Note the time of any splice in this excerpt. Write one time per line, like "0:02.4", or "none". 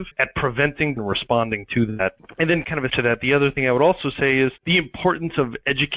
0:01.0
0:02.9